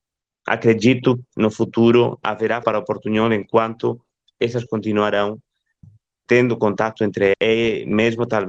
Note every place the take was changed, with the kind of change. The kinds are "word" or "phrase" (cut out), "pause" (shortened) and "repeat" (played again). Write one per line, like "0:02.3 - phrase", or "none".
0:01.3 - word
0:02.6 - word
0:04.7 - word
0:05.8 - word
0:06.3 - word
0:07.3 - word